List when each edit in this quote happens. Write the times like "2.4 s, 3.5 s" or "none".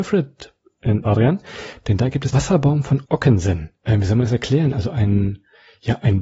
1.0 s, 2.3 s

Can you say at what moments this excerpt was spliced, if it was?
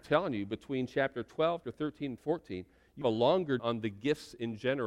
1.6 s, 2.2 s, 3.0 s, 3.6 s

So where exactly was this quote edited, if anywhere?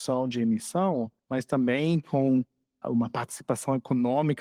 1.2 s, 2.8 s

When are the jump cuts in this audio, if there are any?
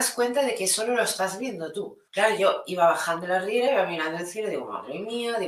2.1 s

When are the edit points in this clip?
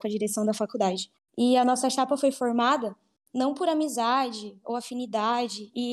1.2 s

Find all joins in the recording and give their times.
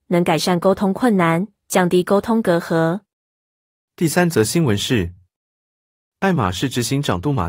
none

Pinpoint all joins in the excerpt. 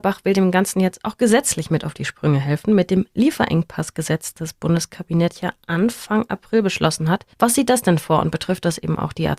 4.3 s, 7.3 s

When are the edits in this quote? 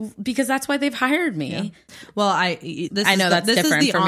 2.9 s

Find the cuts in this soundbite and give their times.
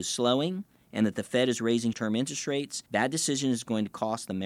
1.9 s, 2.9 s

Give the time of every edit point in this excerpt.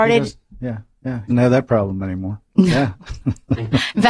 1.3 s

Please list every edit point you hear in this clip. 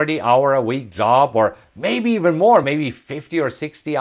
none

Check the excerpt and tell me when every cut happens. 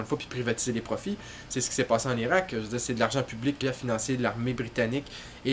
3.6 s

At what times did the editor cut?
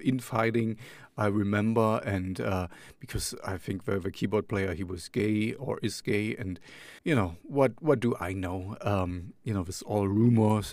7.0 s

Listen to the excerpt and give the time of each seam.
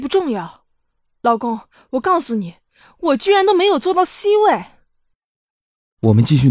none

